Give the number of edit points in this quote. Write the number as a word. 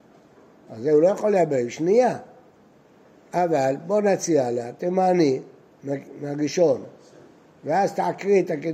zero